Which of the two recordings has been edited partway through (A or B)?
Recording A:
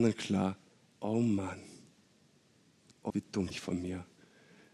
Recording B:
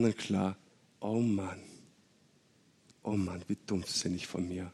A